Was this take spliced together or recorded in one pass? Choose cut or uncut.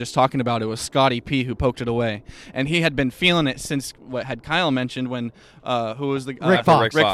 uncut